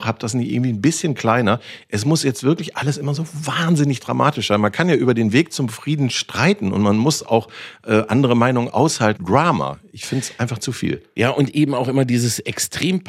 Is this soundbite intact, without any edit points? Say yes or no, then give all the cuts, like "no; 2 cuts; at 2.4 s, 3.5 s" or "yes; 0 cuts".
no; 1 cut; at 9.2 s